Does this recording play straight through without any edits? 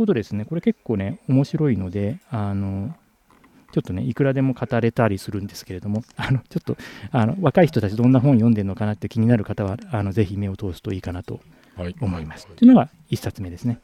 yes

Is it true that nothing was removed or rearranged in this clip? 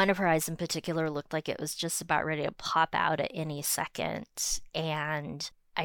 yes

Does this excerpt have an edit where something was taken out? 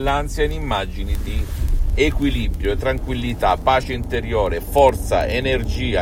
no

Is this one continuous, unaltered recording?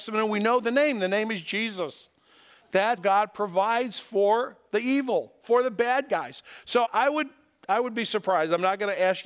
no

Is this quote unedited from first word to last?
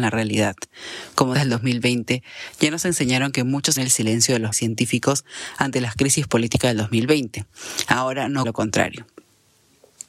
no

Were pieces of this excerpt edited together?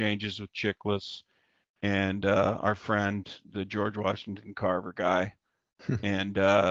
no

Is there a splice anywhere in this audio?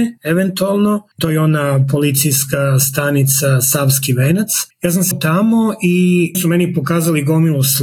yes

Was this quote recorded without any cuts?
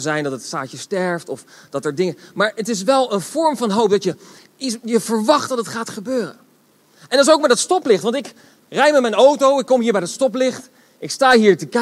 yes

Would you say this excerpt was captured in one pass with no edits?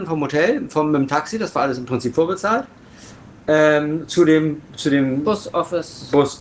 yes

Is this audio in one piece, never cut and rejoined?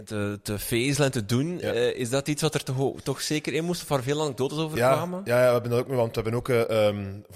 yes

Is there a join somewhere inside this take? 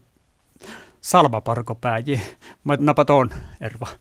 yes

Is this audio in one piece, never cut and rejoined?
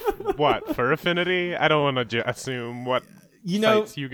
yes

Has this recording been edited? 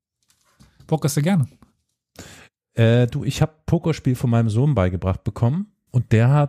no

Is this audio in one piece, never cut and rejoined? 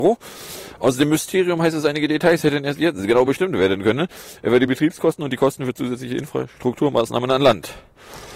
yes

